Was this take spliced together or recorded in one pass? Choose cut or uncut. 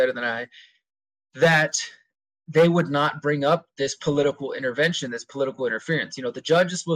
uncut